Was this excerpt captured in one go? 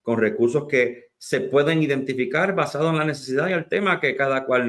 yes; 0 cuts

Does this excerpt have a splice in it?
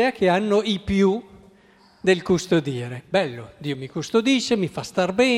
no; 0 cuts

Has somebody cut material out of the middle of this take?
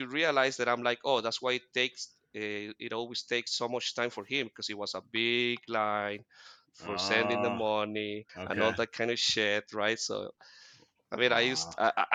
yes; 1 cut; at 8.3 s

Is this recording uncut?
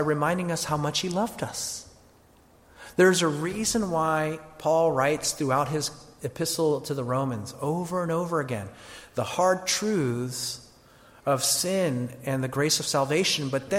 yes; 0 cuts

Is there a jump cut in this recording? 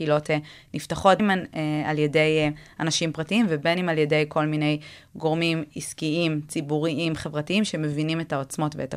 yes; 1 cut; at 1.2 s

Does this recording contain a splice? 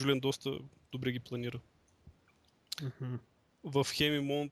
yes; 1 cut; at 0.9 s

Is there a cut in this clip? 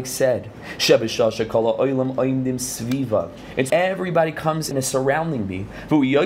yes; 2 cuts; at 3.7 s, 4.7 s

